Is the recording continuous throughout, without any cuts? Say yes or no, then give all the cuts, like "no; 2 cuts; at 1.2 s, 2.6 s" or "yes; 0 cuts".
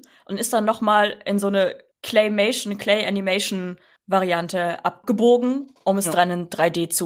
yes; 0 cuts